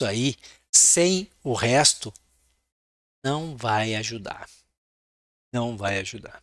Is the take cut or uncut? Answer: uncut